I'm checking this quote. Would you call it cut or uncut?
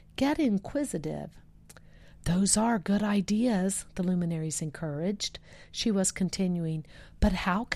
uncut